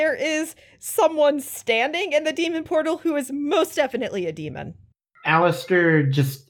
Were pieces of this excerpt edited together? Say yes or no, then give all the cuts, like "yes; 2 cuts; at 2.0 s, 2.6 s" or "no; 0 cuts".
no; 0 cuts